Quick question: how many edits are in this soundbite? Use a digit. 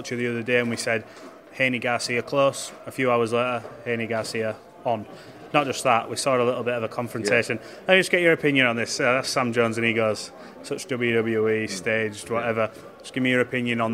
0